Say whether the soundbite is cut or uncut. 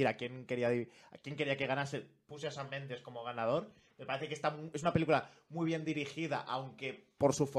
uncut